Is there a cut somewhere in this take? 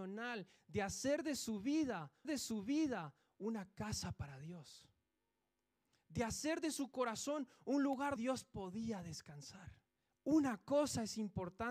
yes; 3 cuts; at 2.2 s, 8.2 s, 10.0 s

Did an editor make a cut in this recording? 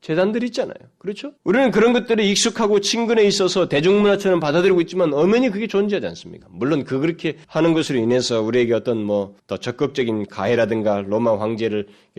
yes; 3 cuts; at 1.4 s, 7.4 s, 9.4 s

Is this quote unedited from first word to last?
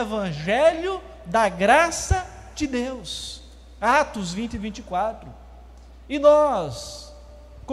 yes; 0 cuts

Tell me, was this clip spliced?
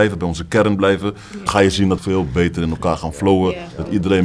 yes; 2 cuts; at 1.5 s, 2.0 s

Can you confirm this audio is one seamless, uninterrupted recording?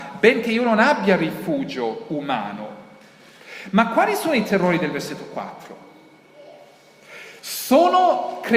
yes; 0 cuts

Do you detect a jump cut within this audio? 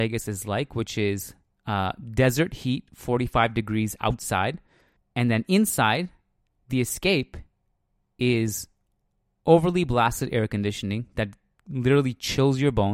yes; 1 cut; at 5.0 s

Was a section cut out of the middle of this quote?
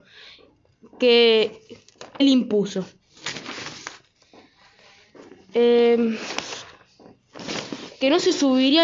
yes; 1 cut; at 2.2 s

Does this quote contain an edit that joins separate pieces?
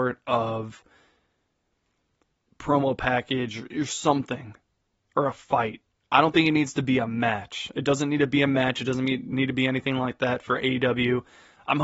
no; 0 cuts

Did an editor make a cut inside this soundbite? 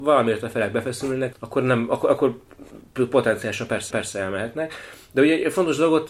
yes; 2 cuts; at 1.3 s, 3.9 s

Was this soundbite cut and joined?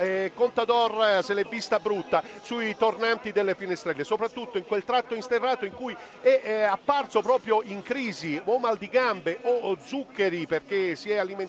no; 0 cuts

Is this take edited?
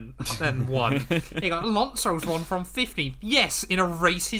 no; 0 cuts

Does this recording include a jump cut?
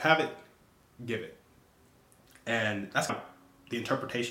yes; 1 cut; at 3.1 s

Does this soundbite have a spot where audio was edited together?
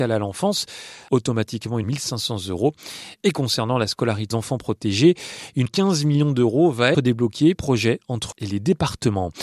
yes; 7 cuts; at 1.1 s, 1.8 s, 4.3 s, 5.7 s, 6.9 s, 7.5 s, 8.3 s

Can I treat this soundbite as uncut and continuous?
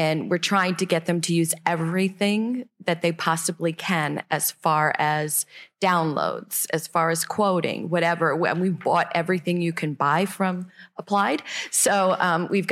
yes; 0 cuts

